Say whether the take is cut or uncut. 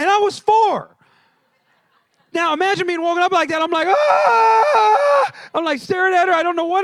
uncut